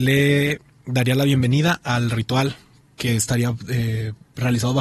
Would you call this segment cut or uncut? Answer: uncut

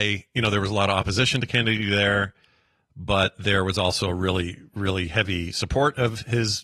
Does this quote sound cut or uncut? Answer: uncut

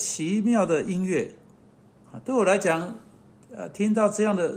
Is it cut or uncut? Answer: uncut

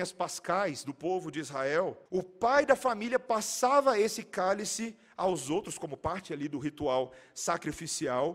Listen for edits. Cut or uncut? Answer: cut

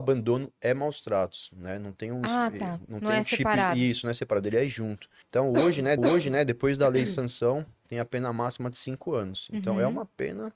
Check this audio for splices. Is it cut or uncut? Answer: cut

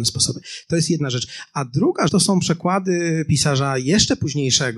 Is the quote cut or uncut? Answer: cut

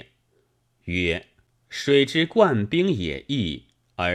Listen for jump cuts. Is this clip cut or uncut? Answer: uncut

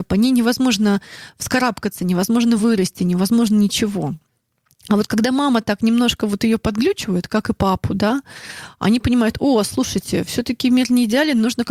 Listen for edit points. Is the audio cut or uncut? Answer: uncut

